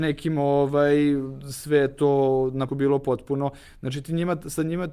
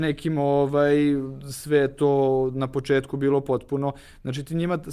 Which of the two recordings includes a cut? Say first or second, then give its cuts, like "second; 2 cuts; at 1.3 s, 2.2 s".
first; 1 cut; at 2.7 s